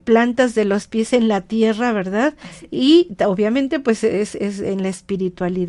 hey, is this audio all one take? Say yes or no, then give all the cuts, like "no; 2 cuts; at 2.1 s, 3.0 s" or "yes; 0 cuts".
yes; 0 cuts